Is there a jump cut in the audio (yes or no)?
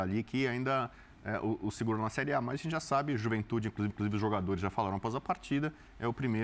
yes